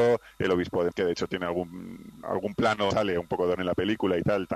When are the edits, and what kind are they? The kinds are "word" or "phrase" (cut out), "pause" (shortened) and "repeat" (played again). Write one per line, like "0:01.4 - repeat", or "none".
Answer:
0:00.9 - word
0:02.2 - word
0:02.9 - word
0:03.6 - word